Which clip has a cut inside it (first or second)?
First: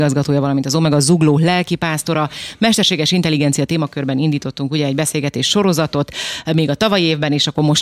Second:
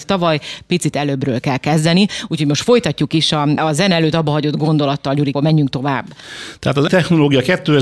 second